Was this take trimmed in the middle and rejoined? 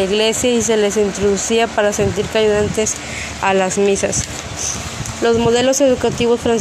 no; 0 cuts

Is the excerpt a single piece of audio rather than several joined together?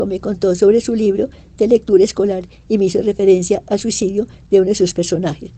yes; 0 cuts

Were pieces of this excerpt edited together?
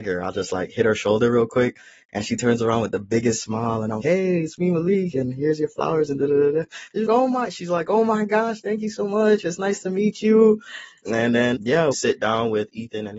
yes; 4 cuts; at 4.0 s, 7.1 s, 11.6 s, 11.9 s

